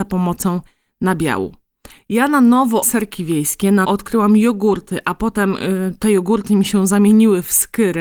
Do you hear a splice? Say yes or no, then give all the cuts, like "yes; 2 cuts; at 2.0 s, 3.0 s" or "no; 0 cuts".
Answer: yes; 2 cuts; at 2.8 s, 3.8 s